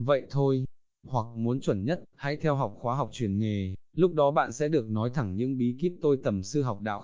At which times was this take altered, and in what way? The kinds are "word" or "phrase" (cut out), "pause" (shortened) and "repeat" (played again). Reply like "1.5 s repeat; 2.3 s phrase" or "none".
none